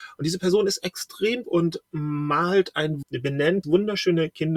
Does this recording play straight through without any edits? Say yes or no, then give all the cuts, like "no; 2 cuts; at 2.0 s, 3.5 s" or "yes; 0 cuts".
no; 3 cuts; at 1.4 s, 3.0 s, 3.6 s